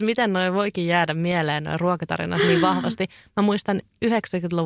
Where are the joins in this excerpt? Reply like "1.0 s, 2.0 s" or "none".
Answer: none